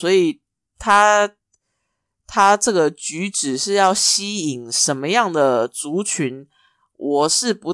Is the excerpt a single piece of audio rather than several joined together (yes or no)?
yes